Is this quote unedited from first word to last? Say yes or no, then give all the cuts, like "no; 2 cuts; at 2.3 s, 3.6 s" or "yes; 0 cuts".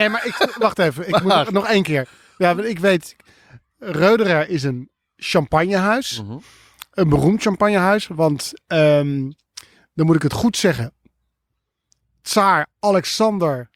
yes; 0 cuts